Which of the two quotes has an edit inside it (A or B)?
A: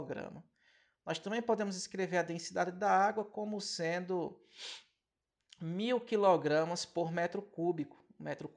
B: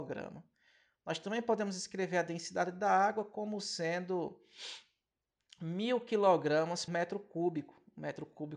B